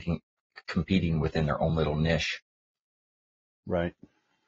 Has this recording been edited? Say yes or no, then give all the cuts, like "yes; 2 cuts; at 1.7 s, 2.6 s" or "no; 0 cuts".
no; 0 cuts